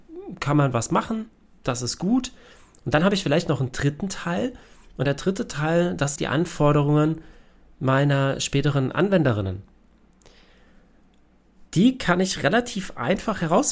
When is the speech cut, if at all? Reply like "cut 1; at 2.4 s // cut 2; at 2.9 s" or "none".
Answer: cut 1; at 6.2 s // cut 2; at 11.7 s